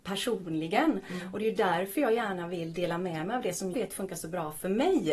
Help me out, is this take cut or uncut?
cut